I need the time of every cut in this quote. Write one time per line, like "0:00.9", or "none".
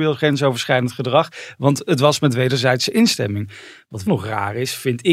0:04.1